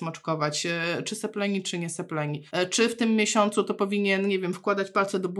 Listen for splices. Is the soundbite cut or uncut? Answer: cut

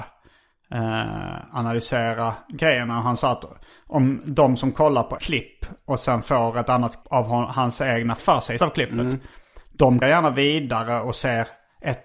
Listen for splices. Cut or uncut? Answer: cut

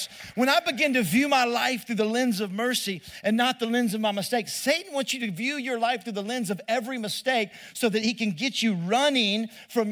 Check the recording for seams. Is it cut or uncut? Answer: uncut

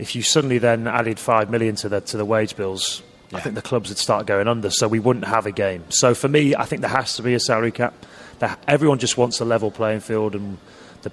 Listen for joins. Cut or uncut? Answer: uncut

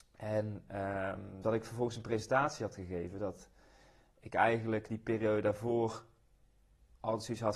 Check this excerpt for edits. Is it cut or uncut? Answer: uncut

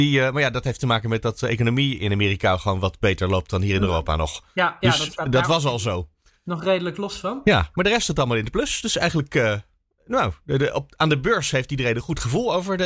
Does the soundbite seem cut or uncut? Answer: uncut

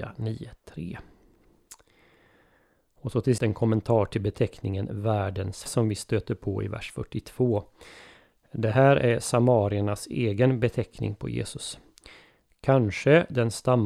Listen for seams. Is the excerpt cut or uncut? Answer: cut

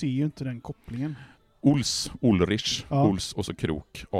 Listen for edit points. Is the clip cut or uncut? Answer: uncut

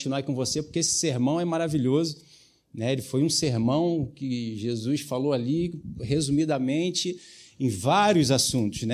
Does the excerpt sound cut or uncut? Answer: uncut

